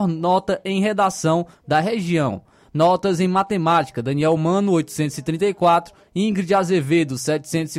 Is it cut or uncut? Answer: uncut